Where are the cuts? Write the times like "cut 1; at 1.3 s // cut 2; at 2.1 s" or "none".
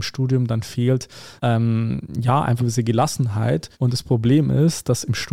cut 1; at 1.4 s // cut 2; at 2.6 s // cut 3; at 3.7 s